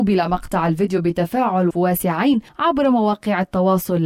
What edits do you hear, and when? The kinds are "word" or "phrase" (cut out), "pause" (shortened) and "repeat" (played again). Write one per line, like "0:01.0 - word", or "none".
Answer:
0:01.7 - word
0:02.5 - pause